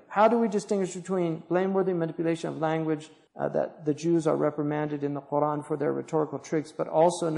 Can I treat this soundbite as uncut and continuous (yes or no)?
no